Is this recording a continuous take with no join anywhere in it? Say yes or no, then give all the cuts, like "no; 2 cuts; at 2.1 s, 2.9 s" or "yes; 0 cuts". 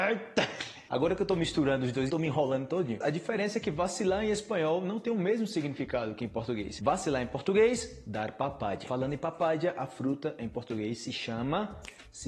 no; 1 cut; at 2.1 s